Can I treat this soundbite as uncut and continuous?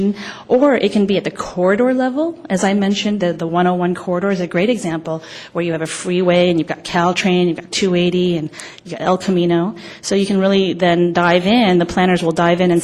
yes; 0 cuts

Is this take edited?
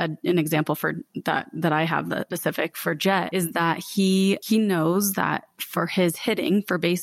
no; 0 cuts

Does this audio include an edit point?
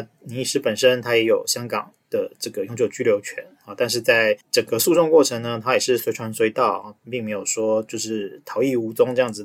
yes; 1 cut; at 4.4 s

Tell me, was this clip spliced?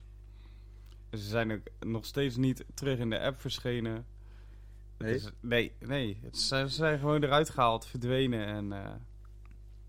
no; 0 cuts

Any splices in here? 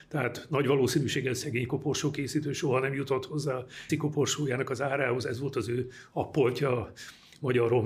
yes; 1 cut; at 3.9 s

